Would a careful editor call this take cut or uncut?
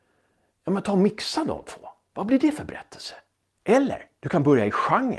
uncut